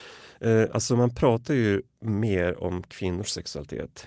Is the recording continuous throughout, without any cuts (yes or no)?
yes